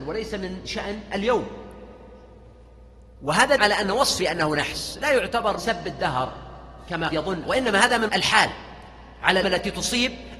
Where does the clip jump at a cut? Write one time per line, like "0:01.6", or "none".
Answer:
0:03.6
0:04.2
0:05.6
0:07.1
0:07.4
0:08.1
0:09.4